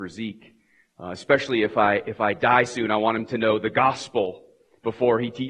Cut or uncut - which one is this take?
uncut